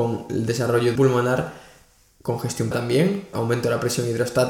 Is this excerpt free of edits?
no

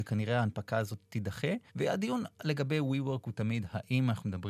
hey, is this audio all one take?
no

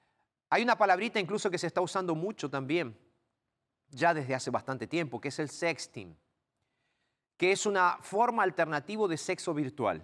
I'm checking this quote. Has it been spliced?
no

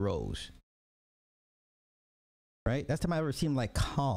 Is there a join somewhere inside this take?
yes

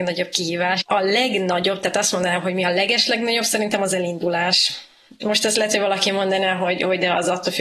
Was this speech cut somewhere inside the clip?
no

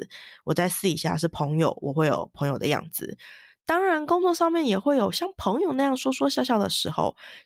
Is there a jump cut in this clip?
no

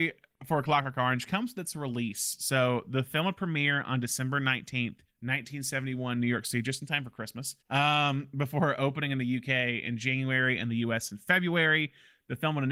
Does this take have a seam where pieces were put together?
yes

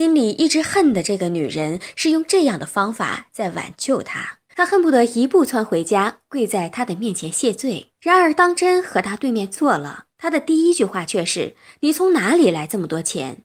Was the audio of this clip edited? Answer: yes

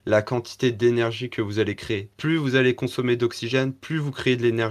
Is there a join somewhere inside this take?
no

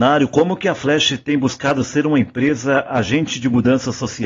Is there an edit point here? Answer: no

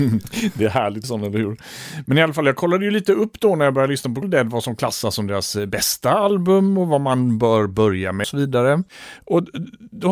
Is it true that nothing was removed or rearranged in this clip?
no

